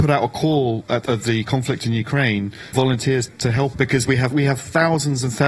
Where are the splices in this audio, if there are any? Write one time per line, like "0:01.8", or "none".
0:01.1
0:02.7
0:03.3
0:03.7
0:04.3